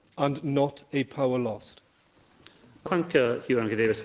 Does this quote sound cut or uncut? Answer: cut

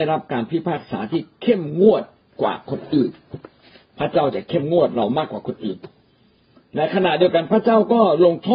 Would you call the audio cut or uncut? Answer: uncut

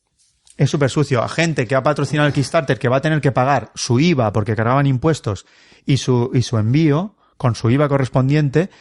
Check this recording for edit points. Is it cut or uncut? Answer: uncut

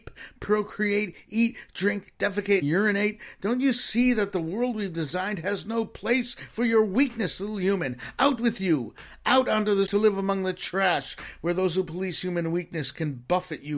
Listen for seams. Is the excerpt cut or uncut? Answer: cut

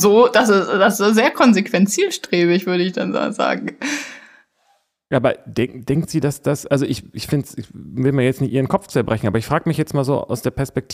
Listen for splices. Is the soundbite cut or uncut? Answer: uncut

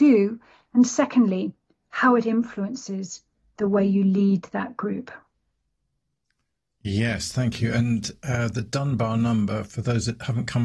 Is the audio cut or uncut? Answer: uncut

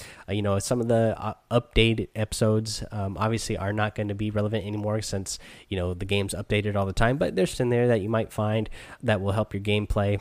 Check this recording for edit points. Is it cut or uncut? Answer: cut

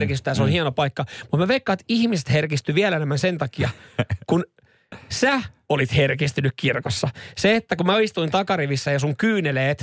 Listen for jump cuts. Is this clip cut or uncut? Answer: uncut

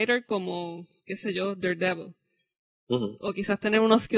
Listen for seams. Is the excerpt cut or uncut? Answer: uncut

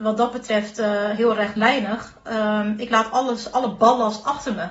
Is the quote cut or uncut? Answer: uncut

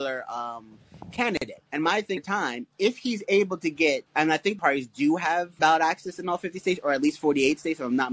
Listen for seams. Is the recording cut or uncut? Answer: cut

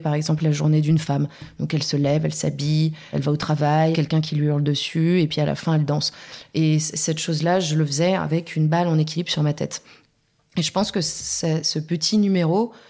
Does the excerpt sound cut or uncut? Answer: cut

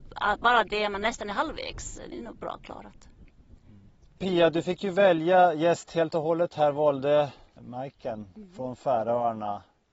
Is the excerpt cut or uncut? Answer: cut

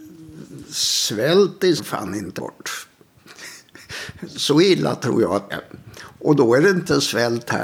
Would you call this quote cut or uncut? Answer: cut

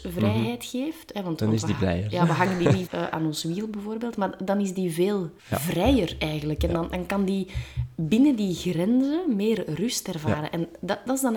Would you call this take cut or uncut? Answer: cut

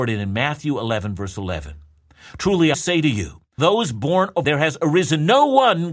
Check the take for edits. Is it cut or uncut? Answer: cut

